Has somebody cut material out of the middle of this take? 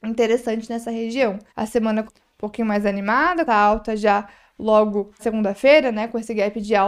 yes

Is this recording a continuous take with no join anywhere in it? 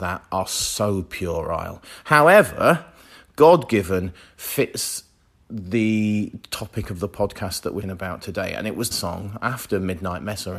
no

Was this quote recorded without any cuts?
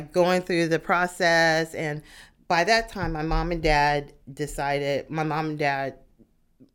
yes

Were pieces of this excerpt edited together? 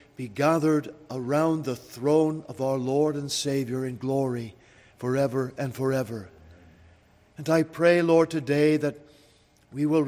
no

